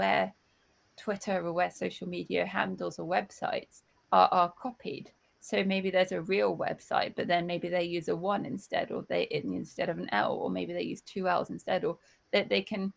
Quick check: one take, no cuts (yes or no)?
yes